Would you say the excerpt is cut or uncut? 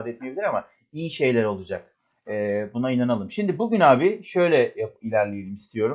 uncut